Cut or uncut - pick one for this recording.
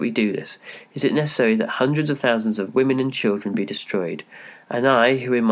uncut